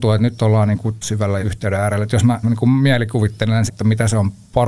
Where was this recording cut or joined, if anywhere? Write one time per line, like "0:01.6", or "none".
0:01.0
0:01.4
0:02.4
0:03.7